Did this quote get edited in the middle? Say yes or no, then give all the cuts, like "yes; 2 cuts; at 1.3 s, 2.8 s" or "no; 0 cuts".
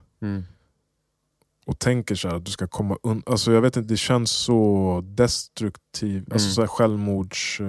no; 0 cuts